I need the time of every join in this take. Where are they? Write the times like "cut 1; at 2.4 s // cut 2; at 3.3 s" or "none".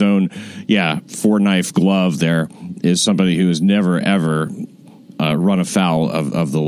none